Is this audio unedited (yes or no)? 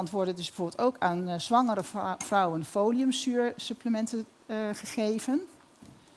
yes